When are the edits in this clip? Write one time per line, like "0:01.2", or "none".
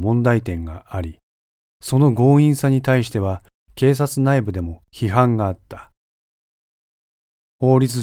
none